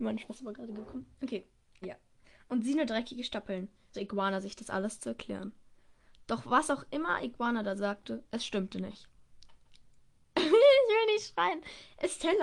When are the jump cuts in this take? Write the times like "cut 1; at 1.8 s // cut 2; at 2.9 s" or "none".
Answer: cut 1; at 1.8 s // cut 2; at 3.9 s